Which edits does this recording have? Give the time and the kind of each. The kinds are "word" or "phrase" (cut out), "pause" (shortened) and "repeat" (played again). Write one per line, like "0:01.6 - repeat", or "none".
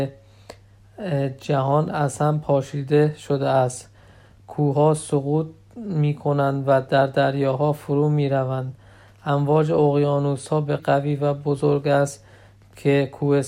0:10.8 - word